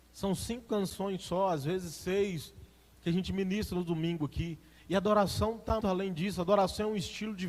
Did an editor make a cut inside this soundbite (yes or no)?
yes